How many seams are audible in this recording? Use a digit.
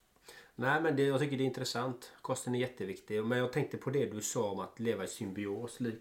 0